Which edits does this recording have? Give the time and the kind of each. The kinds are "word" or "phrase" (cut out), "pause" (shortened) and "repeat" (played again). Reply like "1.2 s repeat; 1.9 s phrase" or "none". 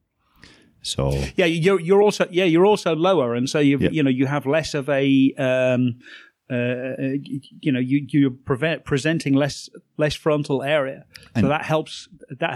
none